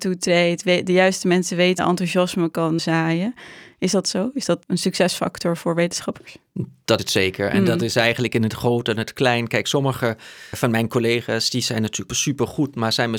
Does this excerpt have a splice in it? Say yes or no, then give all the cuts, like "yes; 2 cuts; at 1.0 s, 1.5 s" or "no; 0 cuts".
yes; 6 cuts; at 1.8 s, 2.8 s, 4.6 s, 7.0 s, 10.5 s, 12.1 s